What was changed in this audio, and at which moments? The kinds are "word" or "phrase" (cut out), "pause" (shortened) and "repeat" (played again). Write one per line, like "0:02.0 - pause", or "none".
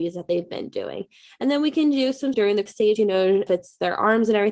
0:02.3 - word
0:02.7 - word
0:03.0 - word
0:03.5 - word